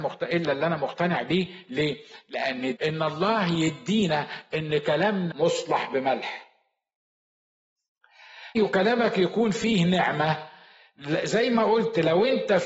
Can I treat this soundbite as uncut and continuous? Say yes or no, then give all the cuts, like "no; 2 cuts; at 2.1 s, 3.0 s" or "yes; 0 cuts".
no; 3 cuts; at 2.7 s, 5.3 s, 8.5 s